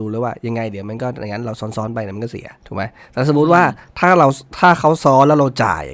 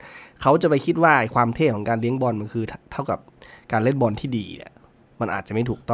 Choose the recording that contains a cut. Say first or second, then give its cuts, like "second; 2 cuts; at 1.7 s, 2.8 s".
first; 1 cut; at 2.6 s